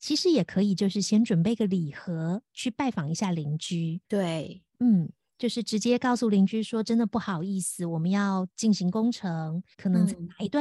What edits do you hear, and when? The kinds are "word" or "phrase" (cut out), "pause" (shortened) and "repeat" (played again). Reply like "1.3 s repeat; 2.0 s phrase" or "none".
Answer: 4.0 s pause; 9.7 s pause